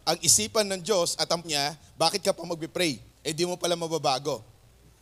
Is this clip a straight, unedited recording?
no; 2 cuts; at 1.4 s, 3.1 s

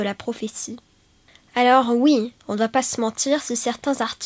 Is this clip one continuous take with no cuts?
no; 1 cut; at 2.4 s

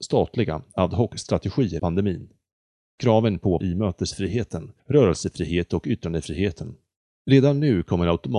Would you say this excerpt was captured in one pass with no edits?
no; 3 cuts; at 1.8 s, 3.6 s, 4.8 s

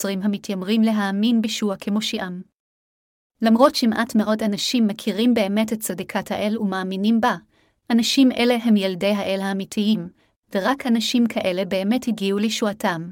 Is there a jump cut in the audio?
no; 0 cuts

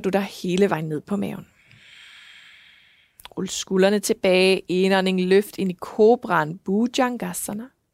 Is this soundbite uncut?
yes; 0 cuts

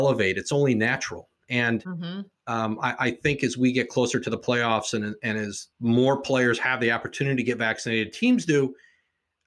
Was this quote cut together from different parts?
yes; 1 cut; at 5.7 s

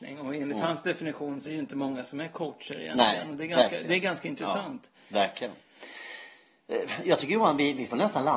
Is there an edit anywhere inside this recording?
yes; 1 cut; at 1.5 s

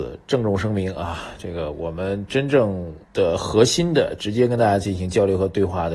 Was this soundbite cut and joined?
yes; 1 cut; at 3.0 s

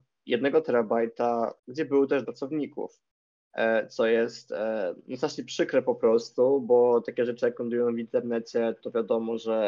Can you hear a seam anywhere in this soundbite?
yes; 2 cuts; at 1.6 s, 2.2 s

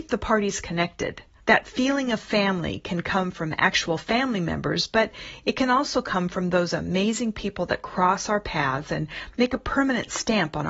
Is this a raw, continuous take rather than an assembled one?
no; 1 cut; at 1.4 s

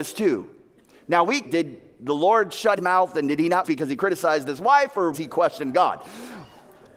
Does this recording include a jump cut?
yes; 4 cuts; at 1.4 s, 2.8 s, 3.6 s, 5.1 s

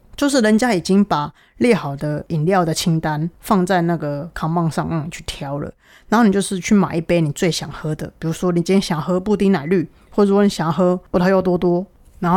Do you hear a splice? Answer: no; 0 cuts

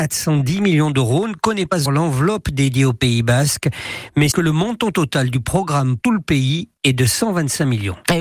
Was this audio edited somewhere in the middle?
yes; 3 cuts; at 1.9 s, 4.3 s, 6.0 s

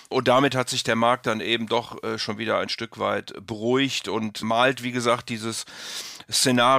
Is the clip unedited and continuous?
yes; 0 cuts

